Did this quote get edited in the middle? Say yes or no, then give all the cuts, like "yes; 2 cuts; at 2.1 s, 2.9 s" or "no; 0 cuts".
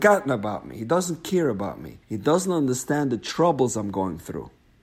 yes; 1 cut; at 2.0 s